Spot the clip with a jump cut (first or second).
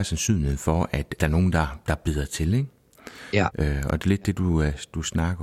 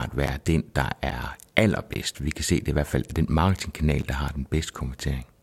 first